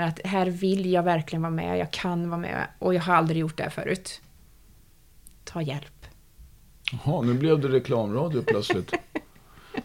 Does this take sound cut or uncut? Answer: uncut